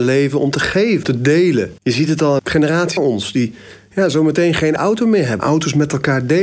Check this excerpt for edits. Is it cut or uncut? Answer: cut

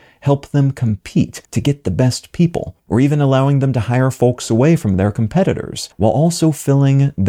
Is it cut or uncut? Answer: cut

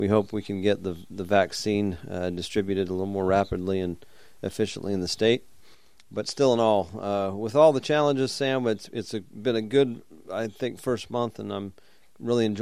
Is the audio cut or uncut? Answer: uncut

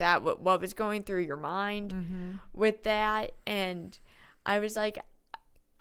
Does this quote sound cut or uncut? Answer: uncut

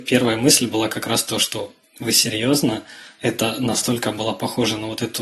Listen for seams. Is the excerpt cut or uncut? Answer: uncut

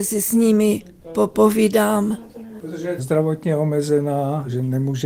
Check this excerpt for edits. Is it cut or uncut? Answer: cut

